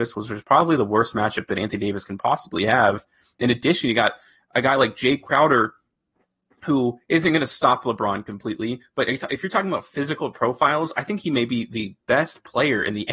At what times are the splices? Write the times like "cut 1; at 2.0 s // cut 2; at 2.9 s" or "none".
none